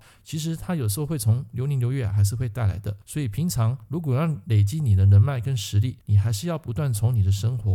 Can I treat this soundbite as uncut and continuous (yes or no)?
no